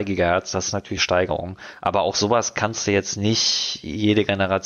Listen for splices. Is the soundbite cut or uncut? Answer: cut